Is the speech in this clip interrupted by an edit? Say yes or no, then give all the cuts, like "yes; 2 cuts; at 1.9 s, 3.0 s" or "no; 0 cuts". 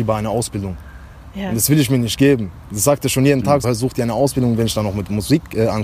yes; 1 cut; at 3.6 s